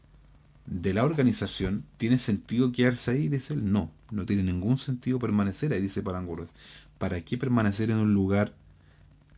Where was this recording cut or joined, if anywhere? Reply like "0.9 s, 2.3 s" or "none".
1.9 s, 4.0 s